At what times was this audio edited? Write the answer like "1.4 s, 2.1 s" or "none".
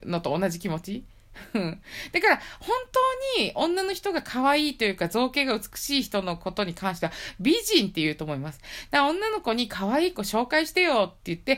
none

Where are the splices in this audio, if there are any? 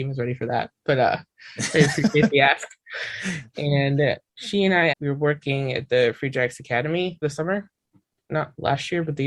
4.9 s, 7.2 s

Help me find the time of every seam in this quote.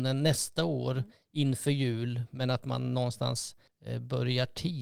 3.7 s

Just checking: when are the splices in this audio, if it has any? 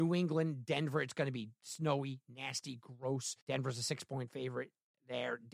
3.4 s

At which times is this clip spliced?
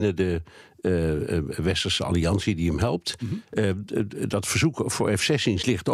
none

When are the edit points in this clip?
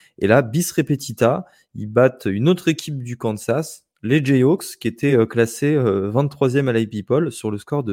none

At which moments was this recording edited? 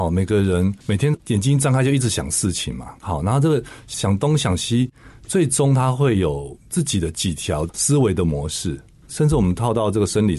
3.0 s

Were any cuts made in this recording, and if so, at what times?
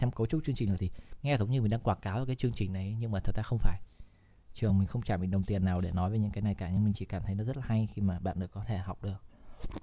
none

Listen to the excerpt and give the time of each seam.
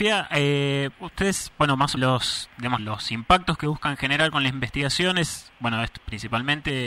0.9 s, 2.0 s, 2.8 s, 5.5 s

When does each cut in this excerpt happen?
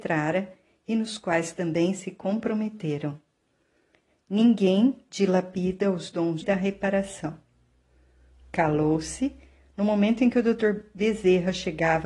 6.4 s

